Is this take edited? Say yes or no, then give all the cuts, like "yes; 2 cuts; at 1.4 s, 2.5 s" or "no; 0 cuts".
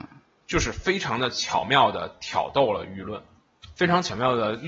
no; 0 cuts